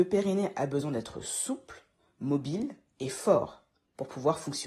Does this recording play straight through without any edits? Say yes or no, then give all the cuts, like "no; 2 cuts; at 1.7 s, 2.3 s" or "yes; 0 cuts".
yes; 0 cuts